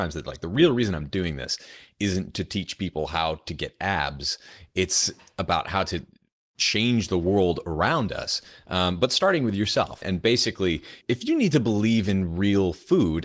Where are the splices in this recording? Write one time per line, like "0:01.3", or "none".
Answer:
0:10.0